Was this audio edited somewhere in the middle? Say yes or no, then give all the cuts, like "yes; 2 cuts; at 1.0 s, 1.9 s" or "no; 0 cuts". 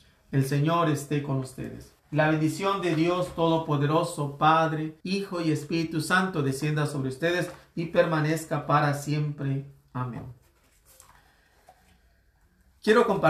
yes; 2 cuts; at 2.0 s, 5.0 s